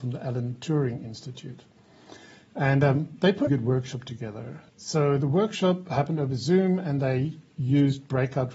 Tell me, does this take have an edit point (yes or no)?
yes